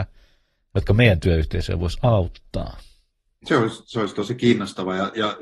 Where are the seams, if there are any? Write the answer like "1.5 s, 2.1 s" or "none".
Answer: none